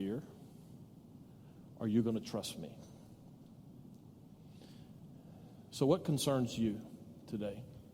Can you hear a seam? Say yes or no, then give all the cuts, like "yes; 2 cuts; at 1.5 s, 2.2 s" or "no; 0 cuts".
no; 0 cuts